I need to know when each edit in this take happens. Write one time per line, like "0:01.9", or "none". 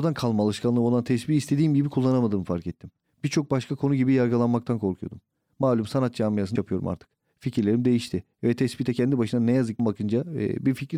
0:06.6
0:09.8